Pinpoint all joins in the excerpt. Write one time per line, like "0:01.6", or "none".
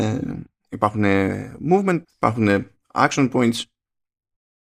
0:02.0